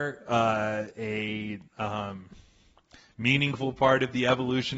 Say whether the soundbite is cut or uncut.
cut